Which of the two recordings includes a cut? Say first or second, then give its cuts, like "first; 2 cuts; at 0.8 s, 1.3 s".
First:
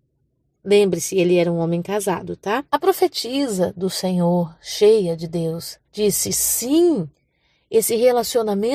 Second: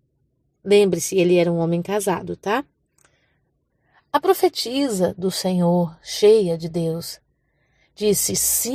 first; 2 cuts; at 2.7 s, 5.8 s